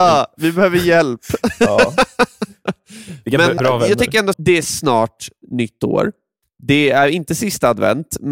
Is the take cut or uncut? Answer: cut